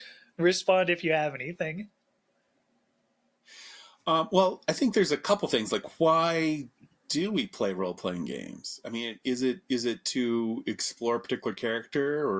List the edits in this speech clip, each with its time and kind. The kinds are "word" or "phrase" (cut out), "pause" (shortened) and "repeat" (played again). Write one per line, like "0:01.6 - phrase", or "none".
none